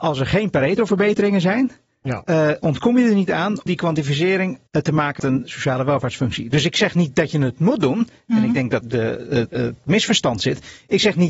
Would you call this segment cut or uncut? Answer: cut